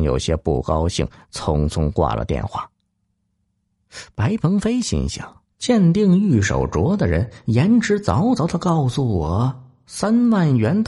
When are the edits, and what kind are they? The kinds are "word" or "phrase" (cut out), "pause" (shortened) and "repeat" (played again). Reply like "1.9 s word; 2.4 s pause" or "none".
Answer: 5.5 s pause